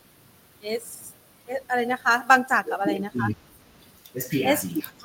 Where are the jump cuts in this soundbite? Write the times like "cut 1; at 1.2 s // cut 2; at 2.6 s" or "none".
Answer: none

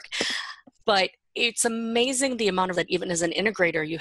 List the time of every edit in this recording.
cut 1; at 2.7 s

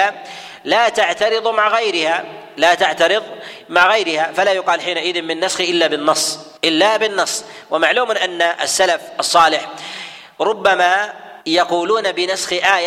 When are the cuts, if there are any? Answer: cut 1; at 6.6 s // cut 2; at 11.4 s

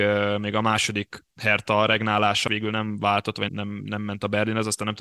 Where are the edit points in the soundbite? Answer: cut 1; at 1.3 s // cut 2; at 2.5 s // cut 3; at 3.5 s

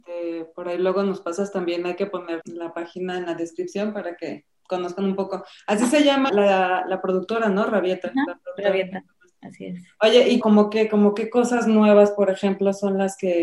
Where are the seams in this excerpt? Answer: cut 1; at 2.4 s // cut 2; at 6.3 s // cut 3; at 10.4 s

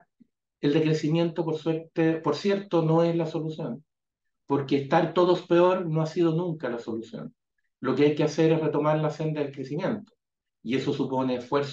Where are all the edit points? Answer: none

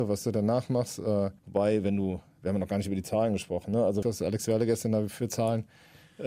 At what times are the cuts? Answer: cut 1; at 1.4 s // cut 2; at 4.0 s

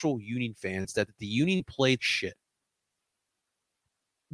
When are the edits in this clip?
cut 1; at 1.1 s // cut 2; at 2.0 s

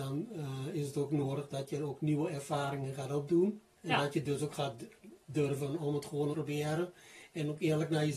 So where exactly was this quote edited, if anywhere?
cut 1; at 6.3 s

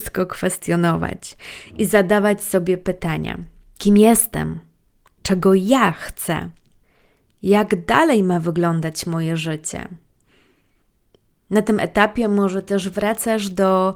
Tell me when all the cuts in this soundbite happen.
none

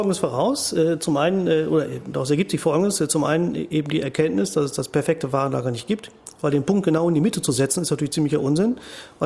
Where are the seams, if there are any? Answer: none

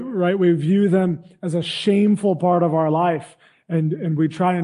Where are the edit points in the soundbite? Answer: none

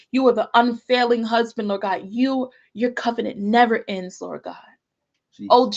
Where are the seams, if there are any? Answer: none

